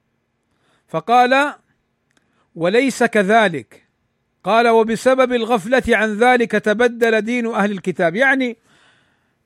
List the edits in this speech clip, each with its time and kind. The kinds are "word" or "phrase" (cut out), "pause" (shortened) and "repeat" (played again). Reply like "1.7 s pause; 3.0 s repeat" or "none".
none